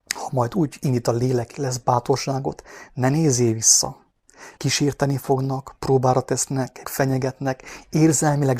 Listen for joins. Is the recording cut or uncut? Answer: cut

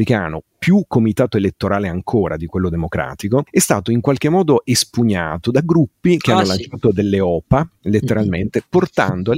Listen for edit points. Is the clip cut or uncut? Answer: uncut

